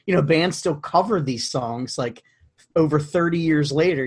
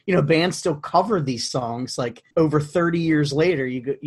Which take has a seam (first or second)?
second